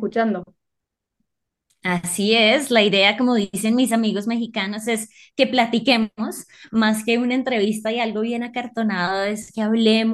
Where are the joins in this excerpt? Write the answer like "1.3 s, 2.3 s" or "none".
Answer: none